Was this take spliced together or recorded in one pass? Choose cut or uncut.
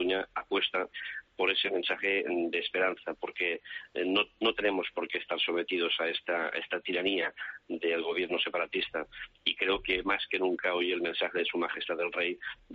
uncut